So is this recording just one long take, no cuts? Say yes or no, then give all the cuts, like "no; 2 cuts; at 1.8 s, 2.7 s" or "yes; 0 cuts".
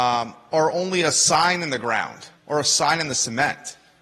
no; 1 cut; at 2.4 s